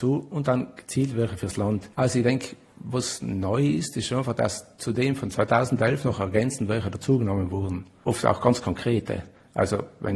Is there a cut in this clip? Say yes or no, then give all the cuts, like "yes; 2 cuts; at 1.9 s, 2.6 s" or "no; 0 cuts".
yes; 1 cut; at 1.9 s